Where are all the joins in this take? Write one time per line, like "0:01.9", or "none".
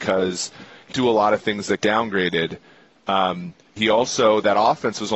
0:00.9
0:01.8
0:03.8